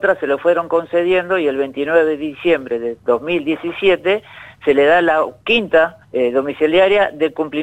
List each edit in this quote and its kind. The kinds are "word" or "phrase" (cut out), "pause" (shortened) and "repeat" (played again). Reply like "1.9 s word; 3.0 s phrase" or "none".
6.0 s pause